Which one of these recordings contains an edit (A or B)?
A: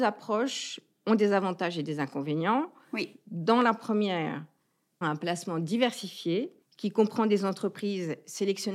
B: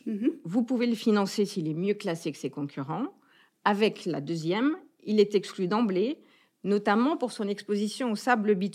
A